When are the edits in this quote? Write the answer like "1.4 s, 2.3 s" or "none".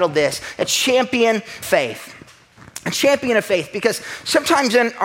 1.6 s